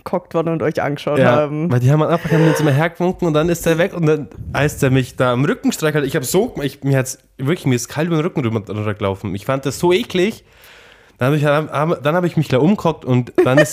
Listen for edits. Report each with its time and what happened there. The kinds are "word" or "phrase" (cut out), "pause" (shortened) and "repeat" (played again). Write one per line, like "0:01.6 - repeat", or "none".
none